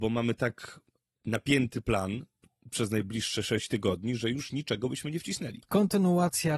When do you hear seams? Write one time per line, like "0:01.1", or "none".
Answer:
none

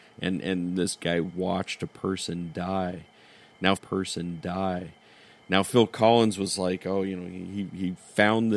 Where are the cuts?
0:03.8

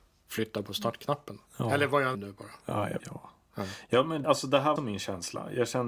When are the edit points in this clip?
0:01.5
0:02.1
0:03.0
0:04.2
0:04.8

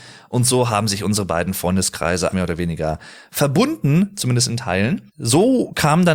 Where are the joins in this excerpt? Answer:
0:02.3

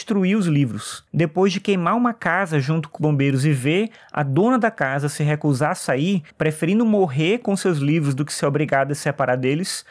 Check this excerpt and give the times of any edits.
0:01.1
0:03.0
0:06.3

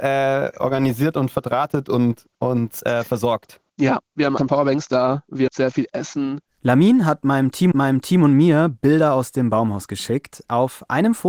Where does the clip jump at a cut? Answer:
0:02.3
0:03.7
0:04.4
0:05.5
0:07.7

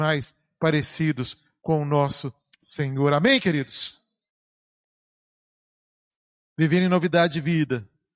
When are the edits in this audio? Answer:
none

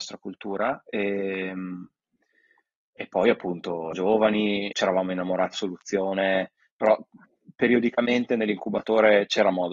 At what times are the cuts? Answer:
0:03.9
0:04.7
0:05.5

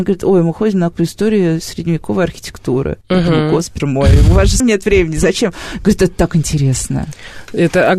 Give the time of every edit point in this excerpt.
0:00.9
0:03.0
0:03.8
0:04.6

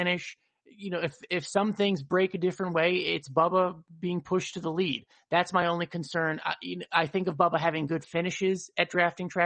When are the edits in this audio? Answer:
none

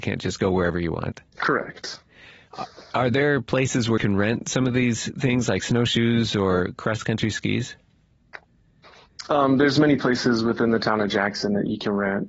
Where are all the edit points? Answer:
0:01.3
0:04.0

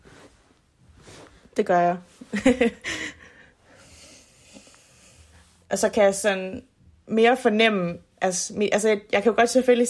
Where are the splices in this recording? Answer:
none

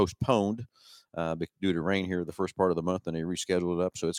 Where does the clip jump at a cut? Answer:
none

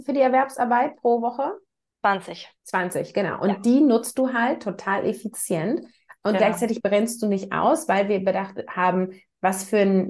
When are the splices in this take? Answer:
0:02.6

